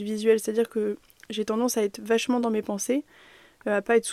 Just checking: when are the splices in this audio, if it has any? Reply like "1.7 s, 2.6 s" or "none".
none

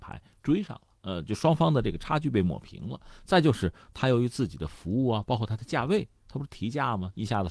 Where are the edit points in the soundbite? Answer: 1.0 s

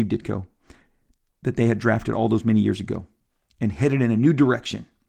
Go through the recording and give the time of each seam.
none

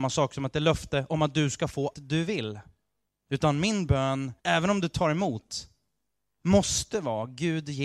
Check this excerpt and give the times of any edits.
1.9 s, 3.1 s, 4.4 s

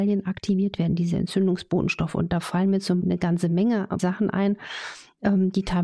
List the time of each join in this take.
3.0 s, 4.0 s

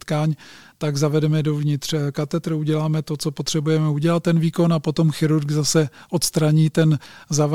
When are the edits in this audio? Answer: none

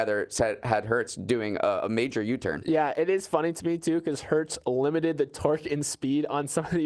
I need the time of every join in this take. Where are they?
none

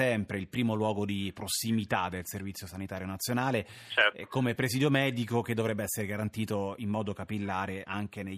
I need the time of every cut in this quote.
none

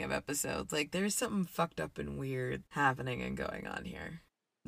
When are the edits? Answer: 2.6 s

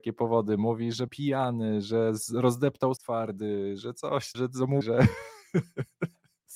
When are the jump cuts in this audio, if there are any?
1.1 s, 3.0 s, 4.3 s, 4.8 s

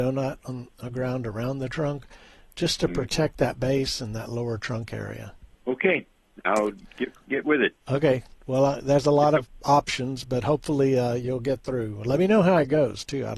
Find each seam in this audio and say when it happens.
5.5 s

